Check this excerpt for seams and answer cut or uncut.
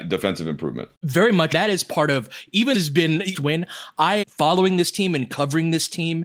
cut